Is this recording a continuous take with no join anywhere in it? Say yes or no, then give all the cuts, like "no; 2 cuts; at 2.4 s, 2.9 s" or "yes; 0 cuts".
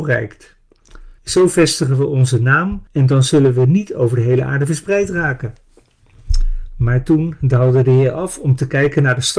no; 2 cuts; at 1.2 s, 2.9 s